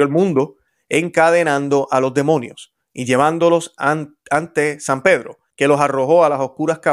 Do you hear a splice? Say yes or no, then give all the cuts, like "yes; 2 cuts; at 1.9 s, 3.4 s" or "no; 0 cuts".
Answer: yes; 1 cut; at 5.5 s